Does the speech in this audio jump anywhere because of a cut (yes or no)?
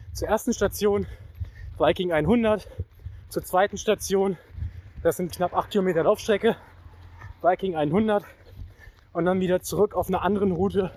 yes